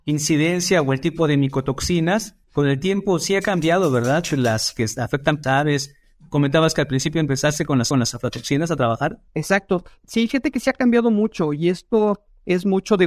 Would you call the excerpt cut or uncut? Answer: cut